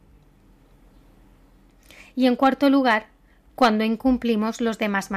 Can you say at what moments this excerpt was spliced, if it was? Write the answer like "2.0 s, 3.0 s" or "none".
none

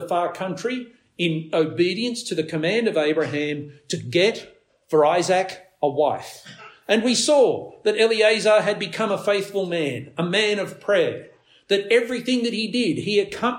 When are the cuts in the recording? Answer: none

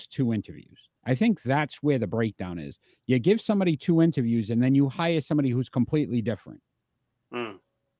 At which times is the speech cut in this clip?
1.0 s

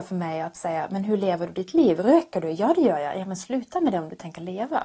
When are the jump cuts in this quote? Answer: none

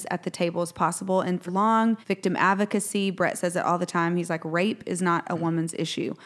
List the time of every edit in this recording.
1.5 s, 2.0 s

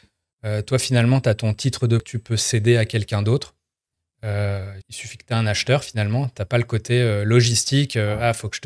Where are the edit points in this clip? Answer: 2.0 s, 4.8 s

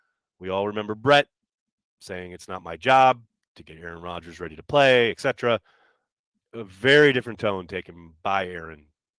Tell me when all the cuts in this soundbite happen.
none

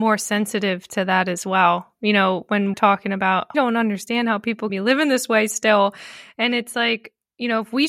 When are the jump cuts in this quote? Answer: 2.7 s, 3.5 s, 4.7 s

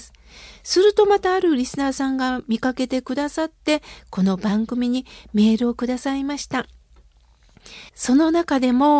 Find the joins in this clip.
7.9 s

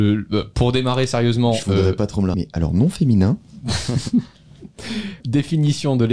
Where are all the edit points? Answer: 2.3 s, 5.2 s

